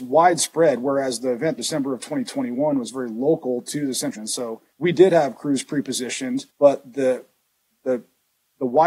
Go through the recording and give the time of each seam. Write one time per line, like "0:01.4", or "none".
0:01.6
0:04.1
0:04.7
0:06.5